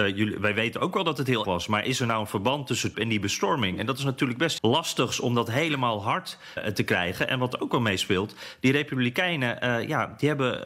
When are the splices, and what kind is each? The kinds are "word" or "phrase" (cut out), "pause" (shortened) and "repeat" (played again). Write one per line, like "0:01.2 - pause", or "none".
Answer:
0:01.4 - word
0:02.9 - word
0:04.6 - word
0:06.6 - word